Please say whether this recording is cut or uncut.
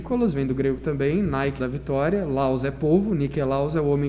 cut